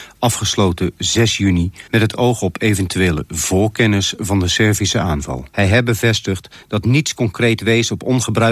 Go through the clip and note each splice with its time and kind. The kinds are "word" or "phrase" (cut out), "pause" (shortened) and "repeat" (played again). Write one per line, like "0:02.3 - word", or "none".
0:01.9 - pause
0:05.5 - pause